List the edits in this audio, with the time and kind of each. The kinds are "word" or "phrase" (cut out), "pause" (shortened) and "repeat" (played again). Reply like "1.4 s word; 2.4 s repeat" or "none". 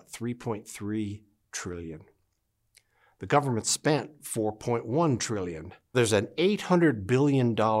5.9 s word